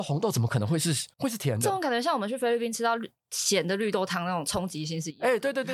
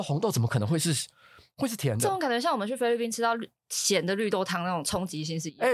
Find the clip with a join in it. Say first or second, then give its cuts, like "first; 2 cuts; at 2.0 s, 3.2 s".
first; 1 cut; at 1.1 s